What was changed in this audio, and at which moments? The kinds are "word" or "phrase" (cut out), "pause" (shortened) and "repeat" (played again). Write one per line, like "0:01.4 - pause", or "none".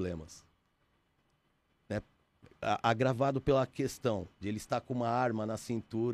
none